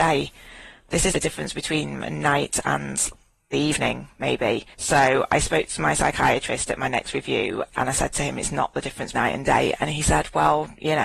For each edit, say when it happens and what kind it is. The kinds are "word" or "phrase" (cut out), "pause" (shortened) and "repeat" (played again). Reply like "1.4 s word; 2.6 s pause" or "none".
1.1 s word; 3.5 s word; 4.7 s pause; 9.1 s word